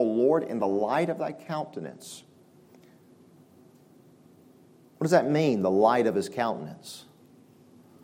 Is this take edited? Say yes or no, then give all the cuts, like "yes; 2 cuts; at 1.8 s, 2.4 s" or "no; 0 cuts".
no; 0 cuts